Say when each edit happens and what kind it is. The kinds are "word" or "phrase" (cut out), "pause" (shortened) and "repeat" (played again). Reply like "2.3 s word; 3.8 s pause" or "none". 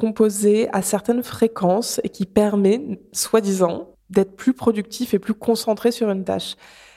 none